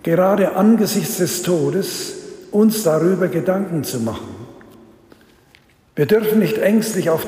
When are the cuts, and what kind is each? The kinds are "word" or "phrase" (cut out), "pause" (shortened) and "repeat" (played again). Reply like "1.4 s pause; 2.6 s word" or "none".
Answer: none